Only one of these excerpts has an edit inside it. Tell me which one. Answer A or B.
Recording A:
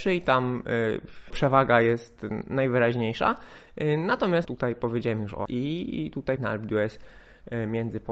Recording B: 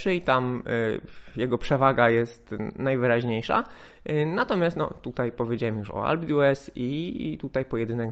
A